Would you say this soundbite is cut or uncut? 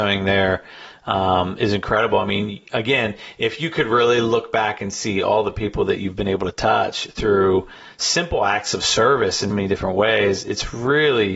cut